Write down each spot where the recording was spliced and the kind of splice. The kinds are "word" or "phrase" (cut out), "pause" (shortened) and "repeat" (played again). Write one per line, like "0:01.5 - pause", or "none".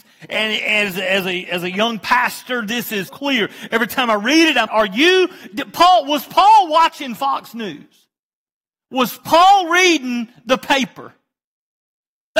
0:03.1 - word
0:04.7 - word